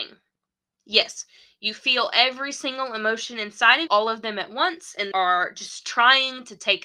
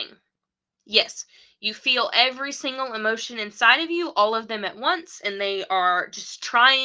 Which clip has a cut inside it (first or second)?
first